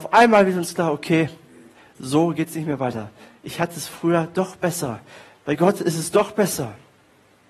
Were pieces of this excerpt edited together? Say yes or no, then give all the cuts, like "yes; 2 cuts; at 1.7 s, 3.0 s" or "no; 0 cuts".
no; 0 cuts